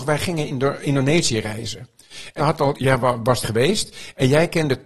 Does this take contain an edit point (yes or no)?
yes